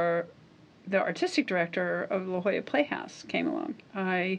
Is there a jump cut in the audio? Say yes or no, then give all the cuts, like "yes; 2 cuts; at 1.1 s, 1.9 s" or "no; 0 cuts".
no; 0 cuts